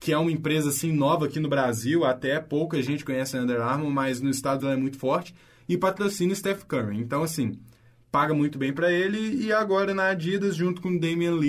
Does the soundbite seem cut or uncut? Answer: cut